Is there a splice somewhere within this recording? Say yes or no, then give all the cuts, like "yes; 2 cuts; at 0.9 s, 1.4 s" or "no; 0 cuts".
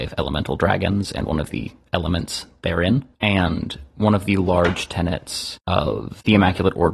no; 0 cuts